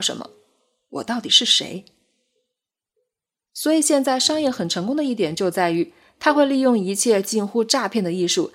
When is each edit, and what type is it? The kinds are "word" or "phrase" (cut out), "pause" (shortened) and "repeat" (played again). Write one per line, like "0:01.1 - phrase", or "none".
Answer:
none